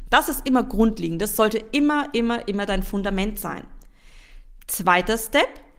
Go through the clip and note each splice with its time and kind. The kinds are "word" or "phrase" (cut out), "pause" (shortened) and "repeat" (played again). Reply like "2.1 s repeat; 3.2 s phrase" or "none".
none